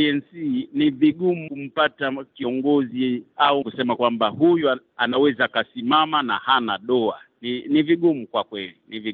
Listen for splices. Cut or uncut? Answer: cut